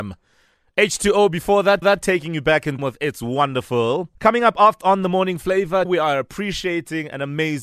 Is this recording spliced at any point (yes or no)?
yes